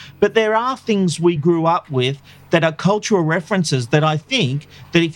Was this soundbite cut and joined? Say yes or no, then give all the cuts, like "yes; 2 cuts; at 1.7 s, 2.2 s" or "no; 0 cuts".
no; 0 cuts